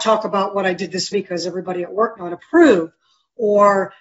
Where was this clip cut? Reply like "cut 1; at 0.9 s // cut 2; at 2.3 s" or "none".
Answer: cut 1; at 1.1 s // cut 2; at 2.2 s